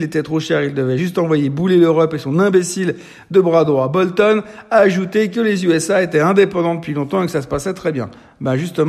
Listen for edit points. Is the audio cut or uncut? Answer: uncut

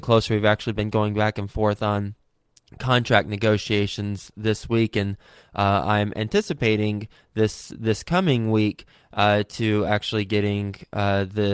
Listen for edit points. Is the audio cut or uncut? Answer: uncut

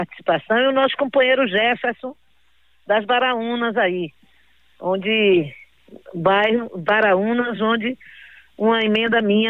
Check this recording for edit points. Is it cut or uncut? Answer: uncut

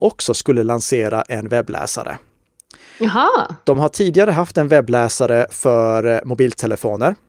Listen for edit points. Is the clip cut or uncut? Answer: uncut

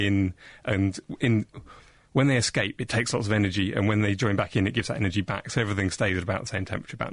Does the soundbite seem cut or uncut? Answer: uncut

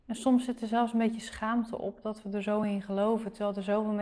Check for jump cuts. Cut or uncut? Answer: uncut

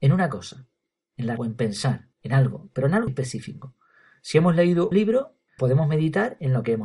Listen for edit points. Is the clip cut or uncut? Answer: cut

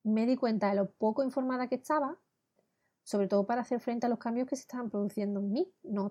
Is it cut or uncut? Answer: uncut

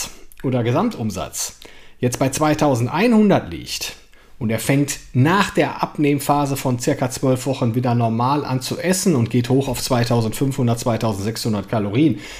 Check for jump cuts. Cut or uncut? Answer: uncut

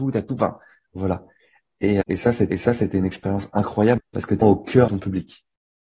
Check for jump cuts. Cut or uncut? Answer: cut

